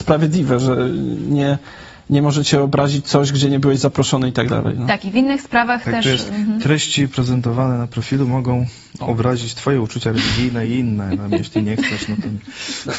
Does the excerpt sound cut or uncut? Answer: uncut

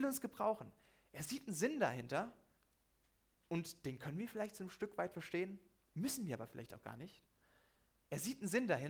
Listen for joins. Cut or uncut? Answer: uncut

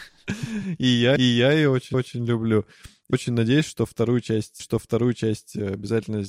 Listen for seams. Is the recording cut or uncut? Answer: cut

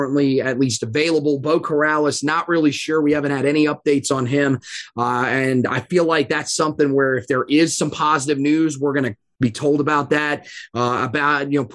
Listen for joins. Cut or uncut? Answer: uncut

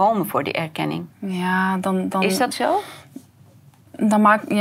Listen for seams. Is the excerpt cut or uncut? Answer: cut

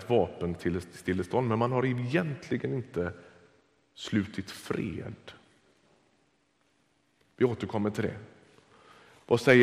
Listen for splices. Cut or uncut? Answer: uncut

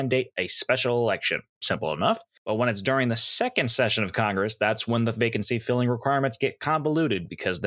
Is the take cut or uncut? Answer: uncut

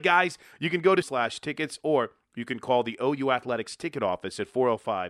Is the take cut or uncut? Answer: cut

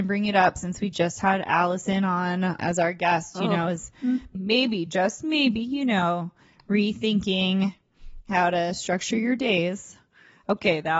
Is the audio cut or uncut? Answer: uncut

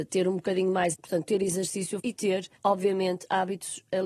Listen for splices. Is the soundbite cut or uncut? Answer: cut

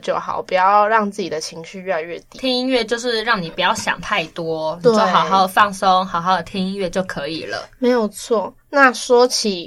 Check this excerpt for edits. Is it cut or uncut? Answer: uncut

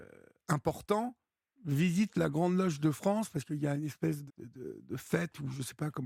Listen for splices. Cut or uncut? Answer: cut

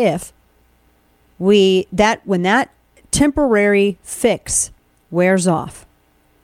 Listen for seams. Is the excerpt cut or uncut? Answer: uncut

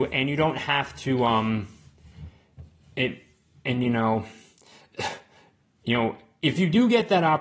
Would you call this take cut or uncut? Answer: uncut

